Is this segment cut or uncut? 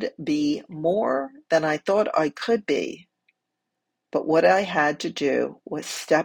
uncut